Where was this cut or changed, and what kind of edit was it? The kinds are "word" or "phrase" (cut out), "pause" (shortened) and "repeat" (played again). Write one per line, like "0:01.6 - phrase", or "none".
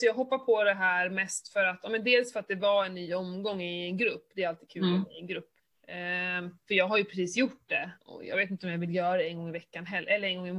0:05.6 - pause
0:08.0 - pause